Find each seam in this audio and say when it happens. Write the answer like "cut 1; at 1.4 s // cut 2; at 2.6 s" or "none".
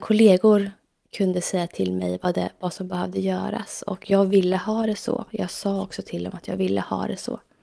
none